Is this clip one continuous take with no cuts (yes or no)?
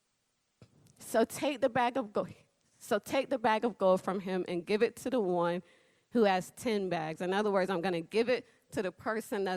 yes